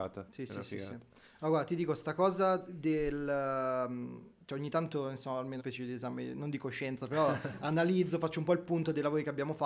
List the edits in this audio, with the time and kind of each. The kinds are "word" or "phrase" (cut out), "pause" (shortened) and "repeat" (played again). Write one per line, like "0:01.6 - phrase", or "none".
0:05.6 - phrase